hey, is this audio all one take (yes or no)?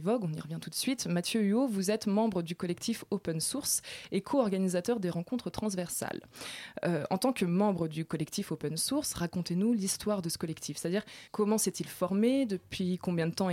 no